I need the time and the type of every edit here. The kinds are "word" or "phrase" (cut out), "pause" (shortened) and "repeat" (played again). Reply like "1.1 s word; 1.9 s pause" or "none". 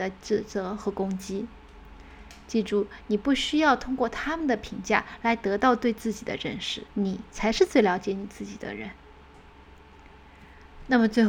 6.9 s pause